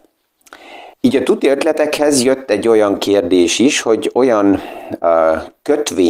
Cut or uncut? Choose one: cut